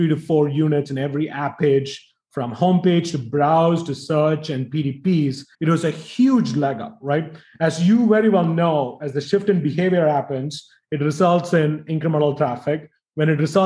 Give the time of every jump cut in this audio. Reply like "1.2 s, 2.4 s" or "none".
5.5 s

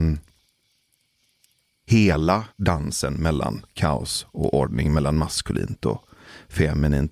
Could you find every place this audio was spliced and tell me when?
2.5 s

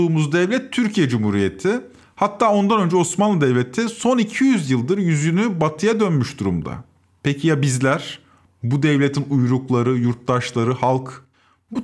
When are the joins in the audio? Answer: none

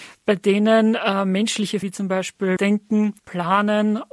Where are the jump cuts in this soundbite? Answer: 1.8 s, 2.6 s, 3.2 s

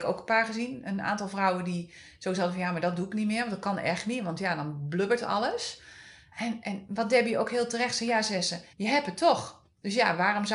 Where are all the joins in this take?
8.7 s

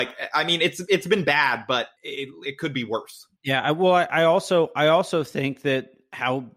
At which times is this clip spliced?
2.0 s, 3.4 s

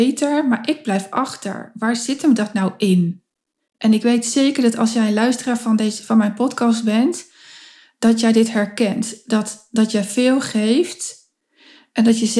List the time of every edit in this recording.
none

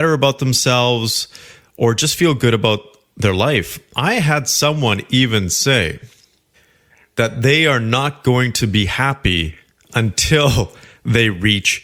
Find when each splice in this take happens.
6.5 s, 9.7 s

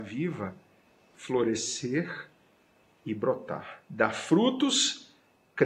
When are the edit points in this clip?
1.1 s, 3.8 s

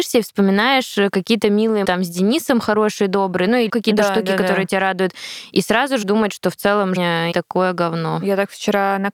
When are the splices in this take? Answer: 1.8 s, 3.7 s, 6.0 s, 7.0 s, 7.3 s

